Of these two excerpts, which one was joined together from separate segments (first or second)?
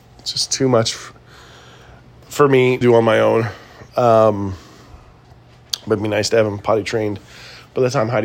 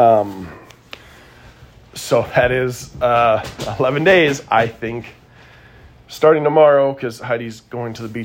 first